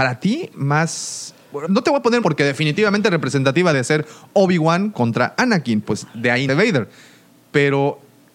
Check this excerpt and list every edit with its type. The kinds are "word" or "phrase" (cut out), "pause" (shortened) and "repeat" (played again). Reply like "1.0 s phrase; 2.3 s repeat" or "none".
1.6 s word; 2.2 s word; 3.7 s word; 4.9 s word; 5.8 s word; 6.5 s word